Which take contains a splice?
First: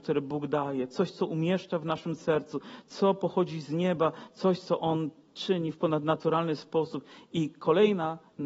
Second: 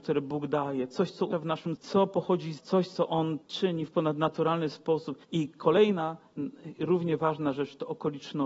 second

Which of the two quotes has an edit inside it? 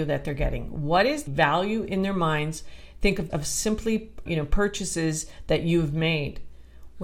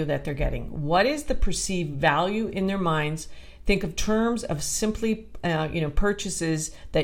first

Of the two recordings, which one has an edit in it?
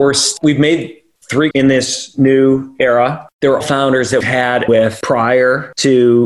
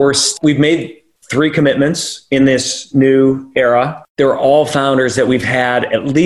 first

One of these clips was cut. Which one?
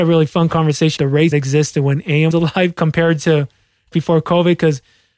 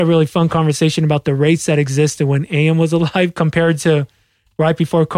first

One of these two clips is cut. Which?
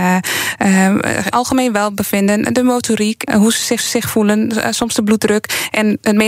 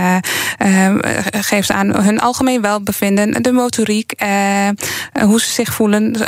first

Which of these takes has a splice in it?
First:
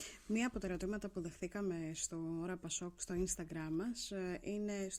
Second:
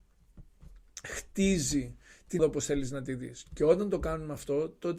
second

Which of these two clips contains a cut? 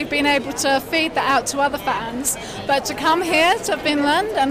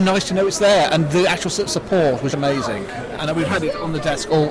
second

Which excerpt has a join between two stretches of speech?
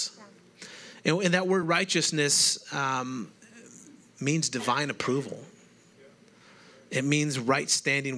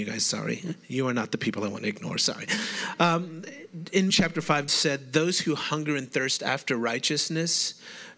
second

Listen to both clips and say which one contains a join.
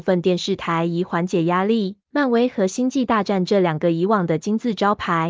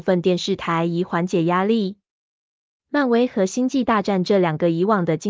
first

